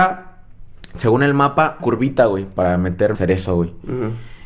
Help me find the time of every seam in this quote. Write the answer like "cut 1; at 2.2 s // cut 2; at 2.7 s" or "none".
cut 1; at 1.8 s // cut 2; at 3.1 s

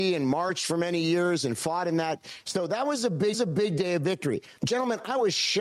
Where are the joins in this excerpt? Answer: cut 1; at 3.3 s // cut 2; at 4.6 s

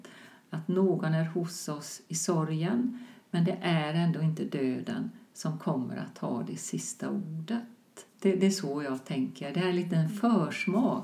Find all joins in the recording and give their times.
cut 1; at 8.1 s

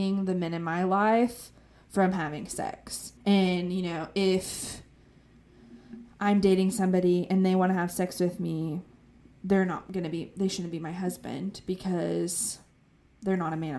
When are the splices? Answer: cut 1; at 3.2 s

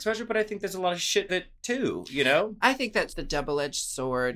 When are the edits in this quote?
cut 1; at 1.3 s // cut 2; at 3.1 s

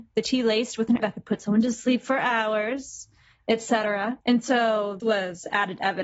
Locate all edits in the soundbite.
cut 1; at 1.0 s // cut 2; at 4.2 s // cut 3; at 5.0 s

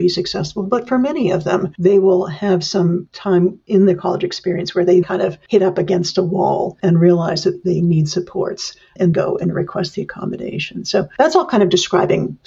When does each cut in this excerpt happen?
cut 1; at 5.0 s // cut 2; at 6.8 s // cut 3; at 9.1 s

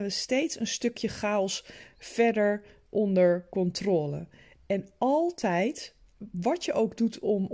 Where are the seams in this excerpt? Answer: none

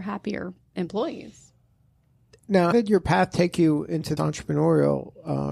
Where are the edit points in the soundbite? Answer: cut 1; at 2.7 s // cut 2; at 4.2 s

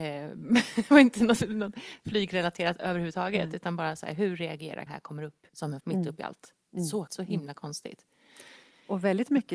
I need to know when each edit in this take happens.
cut 1; at 4.9 s // cut 2; at 5.5 s // cut 3; at 5.8 s // cut 4; at 7.1 s

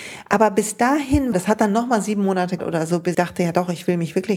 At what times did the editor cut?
cut 1; at 1.3 s // cut 2; at 2.6 s // cut 3; at 3.1 s

